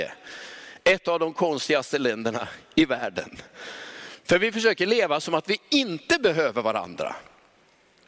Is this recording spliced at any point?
no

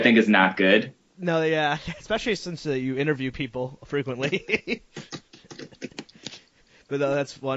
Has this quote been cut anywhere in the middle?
no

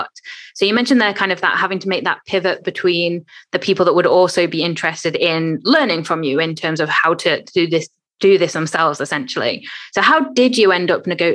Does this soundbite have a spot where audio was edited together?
no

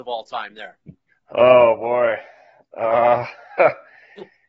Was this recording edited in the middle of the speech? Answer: no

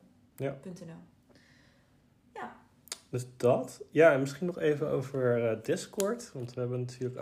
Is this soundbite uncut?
yes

